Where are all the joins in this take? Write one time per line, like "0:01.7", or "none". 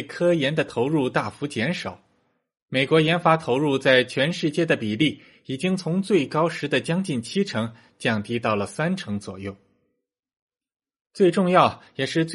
none